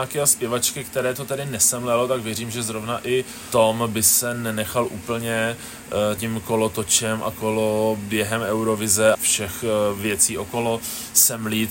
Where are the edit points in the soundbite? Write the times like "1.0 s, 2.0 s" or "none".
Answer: 6.2 s, 9.1 s